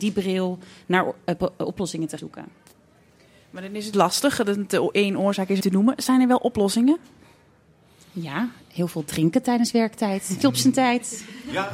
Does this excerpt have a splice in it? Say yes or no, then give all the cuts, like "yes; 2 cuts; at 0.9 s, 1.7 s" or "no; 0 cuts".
yes; 4 cuts; at 2.2 s, 3.9 s, 5.6 s, 10.4 s